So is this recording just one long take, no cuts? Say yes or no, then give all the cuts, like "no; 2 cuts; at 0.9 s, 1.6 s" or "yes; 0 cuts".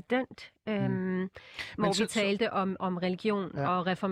yes; 0 cuts